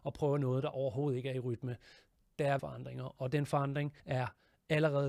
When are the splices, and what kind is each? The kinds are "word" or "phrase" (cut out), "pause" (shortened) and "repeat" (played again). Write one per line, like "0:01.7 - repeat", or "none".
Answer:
0:02.6 - phrase
0:04.0 - pause